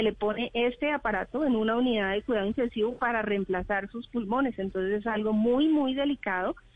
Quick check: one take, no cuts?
yes; 0 cuts

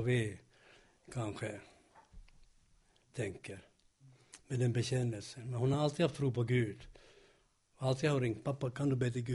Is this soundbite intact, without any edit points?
yes; 0 cuts

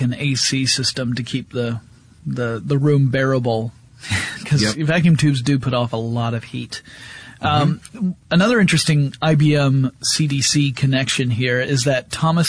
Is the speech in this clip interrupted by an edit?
no; 0 cuts

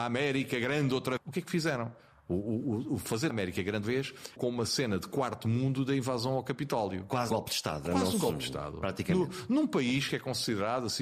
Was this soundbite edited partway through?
yes; 6 cuts; at 1.2 s, 3.3 s, 3.8 s, 4.4 s, 7.3 s, 7.8 s

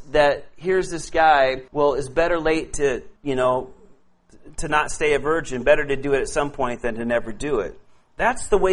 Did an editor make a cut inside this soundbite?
yes; 2 cuts; at 1.7 s, 3.2 s

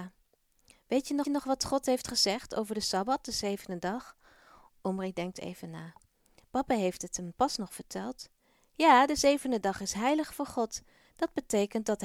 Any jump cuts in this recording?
yes; 1 cut; at 1.2 s

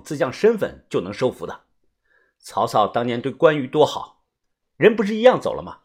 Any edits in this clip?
no; 0 cuts

